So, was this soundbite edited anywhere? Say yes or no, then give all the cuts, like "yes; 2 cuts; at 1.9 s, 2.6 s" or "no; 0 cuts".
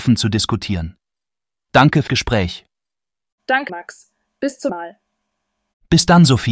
yes; 3 cuts; at 2.1 s, 3.7 s, 4.7 s